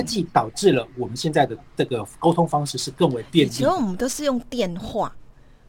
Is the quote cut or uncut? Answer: uncut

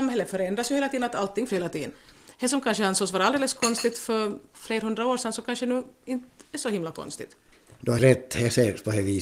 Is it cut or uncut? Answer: cut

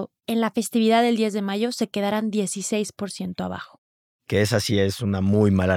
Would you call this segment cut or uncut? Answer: uncut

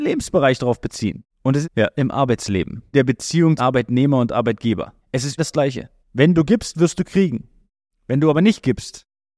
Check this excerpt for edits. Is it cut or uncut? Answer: cut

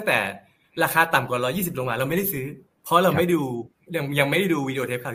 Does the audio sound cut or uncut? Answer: cut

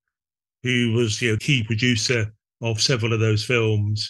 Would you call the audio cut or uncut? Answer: cut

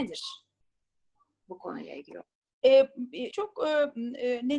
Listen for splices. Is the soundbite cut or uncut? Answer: cut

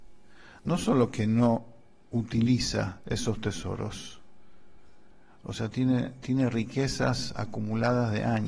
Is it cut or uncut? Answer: uncut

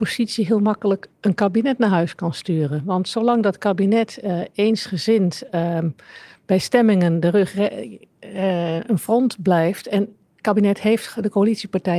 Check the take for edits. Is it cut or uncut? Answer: uncut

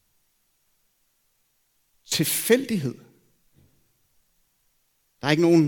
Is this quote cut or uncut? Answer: uncut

